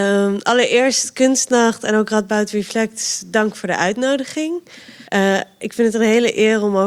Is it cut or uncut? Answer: cut